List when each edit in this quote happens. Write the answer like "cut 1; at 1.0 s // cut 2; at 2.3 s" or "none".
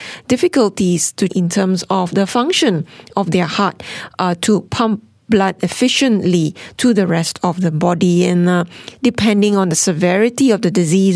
cut 1; at 1.3 s